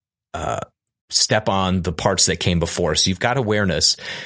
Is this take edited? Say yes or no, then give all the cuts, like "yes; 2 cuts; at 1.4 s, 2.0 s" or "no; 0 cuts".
no; 0 cuts